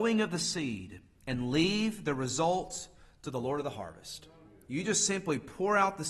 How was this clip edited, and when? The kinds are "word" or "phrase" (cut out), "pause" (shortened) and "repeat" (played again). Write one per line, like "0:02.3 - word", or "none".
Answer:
none